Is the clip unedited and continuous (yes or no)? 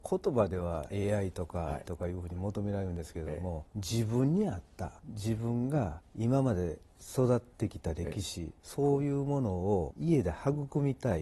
no